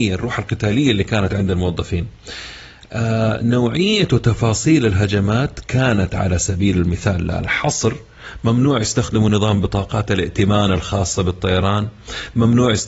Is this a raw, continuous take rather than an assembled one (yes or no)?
yes